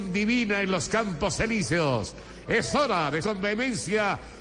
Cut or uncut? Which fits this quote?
cut